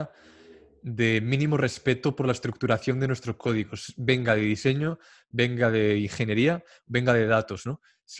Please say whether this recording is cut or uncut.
uncut